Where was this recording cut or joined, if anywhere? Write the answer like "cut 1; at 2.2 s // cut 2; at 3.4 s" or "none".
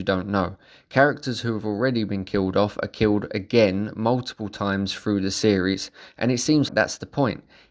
cut 1; at 6.7 s